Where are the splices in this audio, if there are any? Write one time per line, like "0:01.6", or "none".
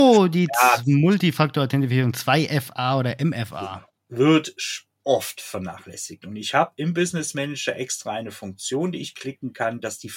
0:04.0
0:05.0